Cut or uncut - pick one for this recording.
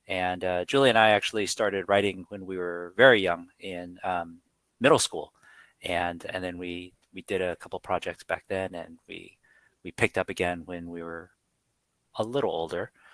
uncut